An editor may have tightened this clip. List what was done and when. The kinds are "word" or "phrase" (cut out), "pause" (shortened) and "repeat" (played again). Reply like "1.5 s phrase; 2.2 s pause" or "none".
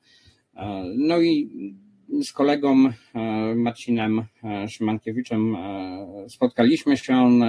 none